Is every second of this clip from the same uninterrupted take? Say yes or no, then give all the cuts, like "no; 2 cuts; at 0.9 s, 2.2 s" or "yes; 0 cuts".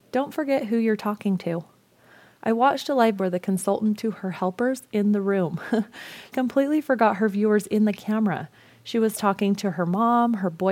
no; 3 cuts; at 3.2 s, 4.0 s, 6.3 s